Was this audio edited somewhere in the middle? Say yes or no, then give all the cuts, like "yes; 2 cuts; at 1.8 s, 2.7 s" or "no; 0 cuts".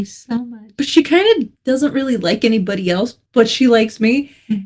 yes; 2 cuts; at 1.6 s, 3.3 s